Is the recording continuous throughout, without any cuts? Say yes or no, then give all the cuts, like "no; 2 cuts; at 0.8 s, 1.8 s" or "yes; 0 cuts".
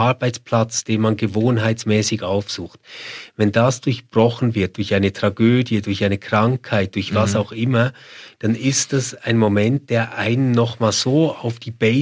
yes; 0 cuts